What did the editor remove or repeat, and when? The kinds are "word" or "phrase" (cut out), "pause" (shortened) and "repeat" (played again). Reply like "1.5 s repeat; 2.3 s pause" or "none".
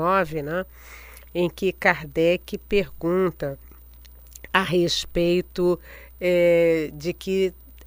none

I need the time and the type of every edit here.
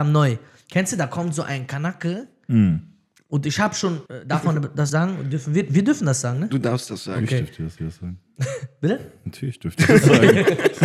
4.1 s pause; 4.9 s word; 7.8 s repeat

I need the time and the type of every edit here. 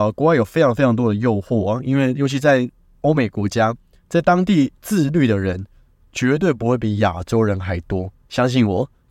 4.7 s pause

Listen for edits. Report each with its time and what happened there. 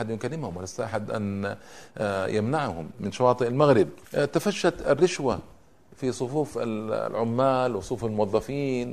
4.0 s pause

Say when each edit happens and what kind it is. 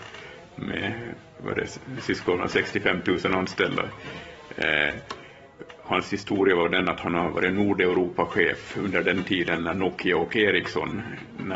none

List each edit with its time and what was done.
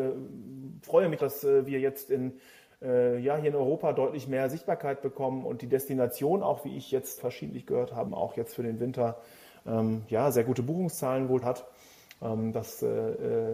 1.2 s word; 7.2 s word; 8.1 s word; 11.4 s word

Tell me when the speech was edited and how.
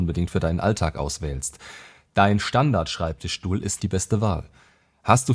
3.8 s word

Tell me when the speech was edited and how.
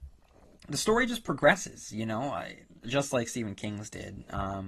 2.8 s word

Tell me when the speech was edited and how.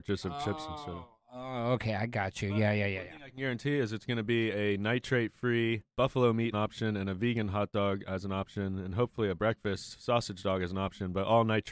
5.9 s pause; 6.5 s phrase

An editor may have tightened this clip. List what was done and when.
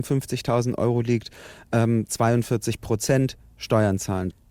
none

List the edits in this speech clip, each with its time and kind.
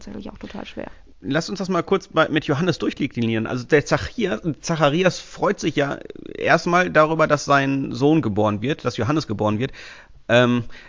none

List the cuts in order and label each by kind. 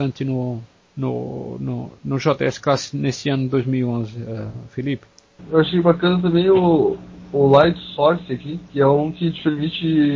8.7 s pause

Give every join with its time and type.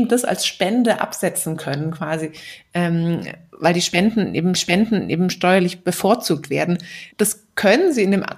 4.6 s repeat; 7.1 s pause

